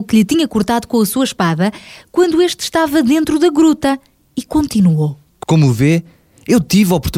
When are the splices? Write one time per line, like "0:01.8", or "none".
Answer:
none